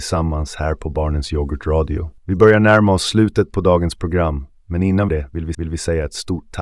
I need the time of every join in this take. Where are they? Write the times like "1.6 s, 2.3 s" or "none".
2.2 s, 5.1 s, 5.5 s

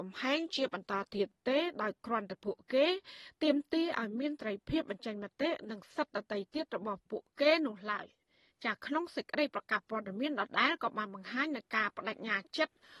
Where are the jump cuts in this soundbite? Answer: none

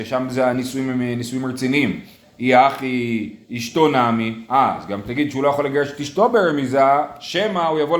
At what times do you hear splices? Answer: 2.2 s, 3.5 s

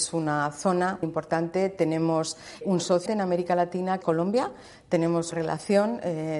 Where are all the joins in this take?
1.0 s, 2.6 s, 3.1 s, 4.0 s, 5.3 s

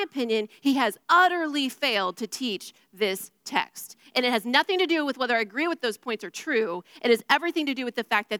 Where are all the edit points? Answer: 1.0 s

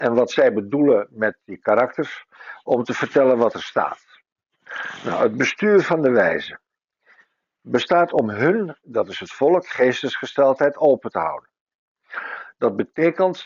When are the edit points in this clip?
none

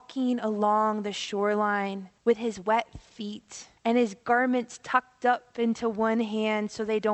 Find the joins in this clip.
2.2 s, 3.8 s

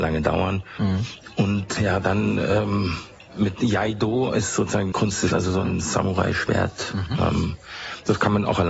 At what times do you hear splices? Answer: 1.8 s, 3.3 s, 4.9 s, 5.3 s

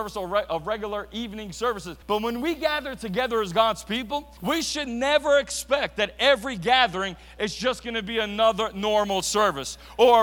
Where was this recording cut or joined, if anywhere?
2.0 s, 4.4 s

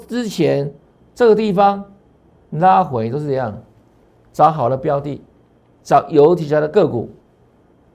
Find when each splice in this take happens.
none

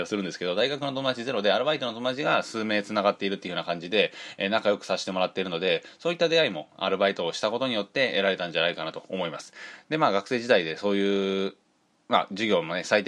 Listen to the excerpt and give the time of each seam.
none

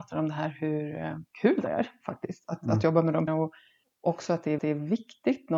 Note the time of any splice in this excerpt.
1.3 s, 3.3 s, 3.8 s, 4.6 s

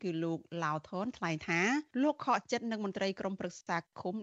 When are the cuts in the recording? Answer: 1.9 s

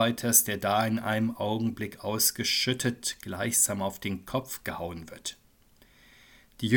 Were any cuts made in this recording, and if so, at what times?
none

